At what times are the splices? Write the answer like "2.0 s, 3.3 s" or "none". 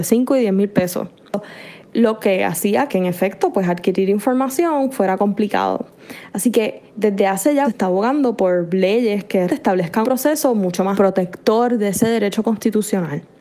2.9 s, 6.9 s, 7.6 s, 9.5 s, 10.0 s, 10.9 s